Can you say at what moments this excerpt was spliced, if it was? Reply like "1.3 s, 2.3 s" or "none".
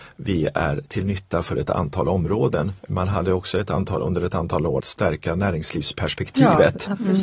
2.8 s, 4.8 s